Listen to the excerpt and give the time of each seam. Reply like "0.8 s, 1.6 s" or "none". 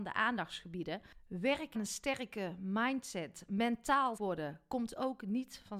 1.7 s, 4.2 s